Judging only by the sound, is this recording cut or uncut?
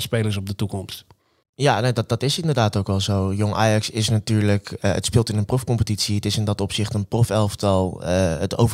uncut